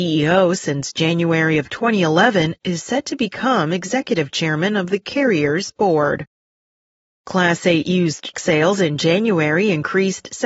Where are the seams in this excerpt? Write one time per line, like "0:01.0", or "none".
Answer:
0:08.3